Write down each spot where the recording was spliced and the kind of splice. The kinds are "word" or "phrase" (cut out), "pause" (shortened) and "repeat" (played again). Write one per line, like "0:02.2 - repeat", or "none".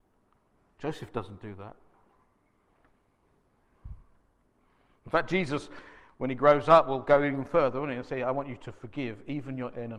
none